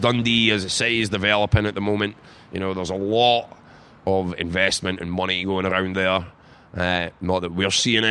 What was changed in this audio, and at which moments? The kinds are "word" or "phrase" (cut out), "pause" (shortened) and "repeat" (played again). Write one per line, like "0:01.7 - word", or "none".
none